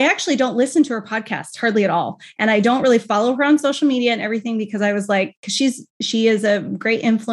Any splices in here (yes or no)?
no